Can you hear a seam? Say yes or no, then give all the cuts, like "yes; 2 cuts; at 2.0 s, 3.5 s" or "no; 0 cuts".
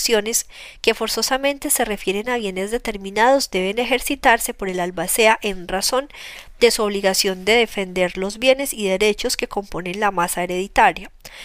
no; 0 cuts